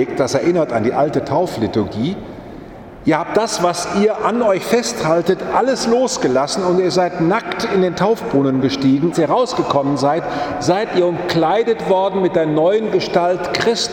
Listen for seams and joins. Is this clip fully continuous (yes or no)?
no